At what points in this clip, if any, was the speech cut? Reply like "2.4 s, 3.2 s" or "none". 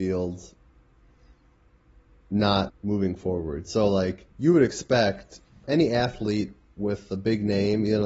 2.7 s, 4.3 s, 5.6 s